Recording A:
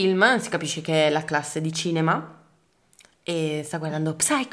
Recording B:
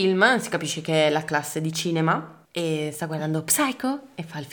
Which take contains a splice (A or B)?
B